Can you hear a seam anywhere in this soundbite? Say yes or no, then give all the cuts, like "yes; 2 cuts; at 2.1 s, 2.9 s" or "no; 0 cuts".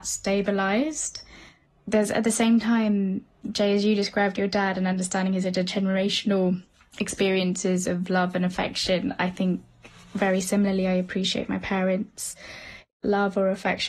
no; 0 cuts